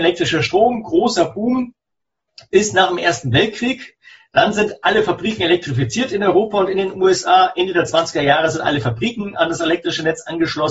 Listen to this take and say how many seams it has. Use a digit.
0